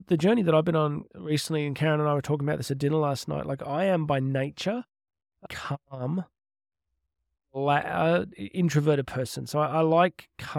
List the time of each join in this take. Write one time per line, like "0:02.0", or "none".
0:05.5